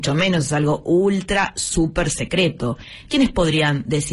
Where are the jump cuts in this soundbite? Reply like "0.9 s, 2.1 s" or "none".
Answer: none